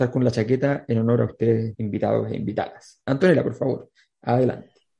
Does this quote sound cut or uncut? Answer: cut